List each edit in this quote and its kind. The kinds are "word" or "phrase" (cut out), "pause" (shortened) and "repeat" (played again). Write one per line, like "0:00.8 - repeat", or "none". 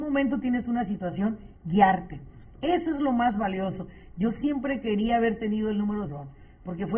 0:06.1 - phrase